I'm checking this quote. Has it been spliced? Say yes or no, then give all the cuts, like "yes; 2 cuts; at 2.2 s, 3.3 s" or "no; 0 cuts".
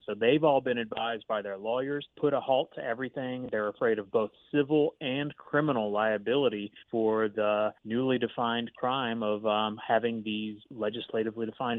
yes; 4 cuts; at 2.1 s, 6.8 s, 7.8 s, 10.6 s